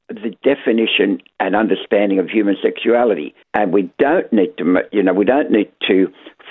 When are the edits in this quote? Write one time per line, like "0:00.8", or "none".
0:03.4